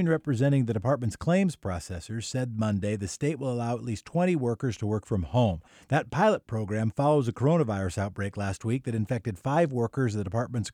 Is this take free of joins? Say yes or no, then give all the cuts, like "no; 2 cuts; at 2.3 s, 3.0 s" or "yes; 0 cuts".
yes; 0 cuts